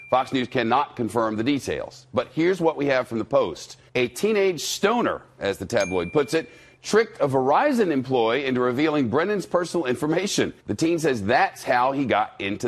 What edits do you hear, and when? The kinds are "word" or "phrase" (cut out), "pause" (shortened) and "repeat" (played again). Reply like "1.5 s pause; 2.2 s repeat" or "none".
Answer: 3.9 s pause; 10.6 s pause

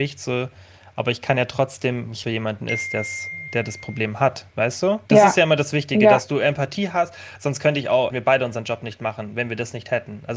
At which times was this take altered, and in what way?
2.2 s phrase; 4.5 s pause; 5.1 s pause; 8.1 s phrase

